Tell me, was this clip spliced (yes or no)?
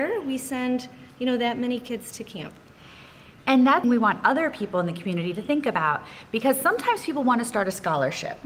yes